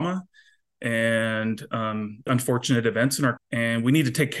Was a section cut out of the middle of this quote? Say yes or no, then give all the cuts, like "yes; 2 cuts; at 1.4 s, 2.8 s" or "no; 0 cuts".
yes; 2 cuts; at 2.3 s, 3.4 s